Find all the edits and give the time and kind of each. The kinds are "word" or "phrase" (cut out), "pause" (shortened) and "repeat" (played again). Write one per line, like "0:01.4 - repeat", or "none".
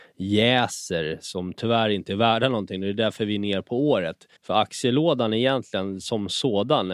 0:04.4 - pause